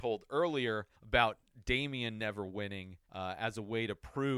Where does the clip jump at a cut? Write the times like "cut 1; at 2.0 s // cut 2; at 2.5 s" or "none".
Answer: cut 1; at 0.9 s // cut 2; at 3.1 s